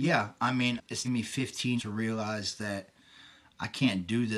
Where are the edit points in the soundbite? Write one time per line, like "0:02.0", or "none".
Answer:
0:01.0
0:01.8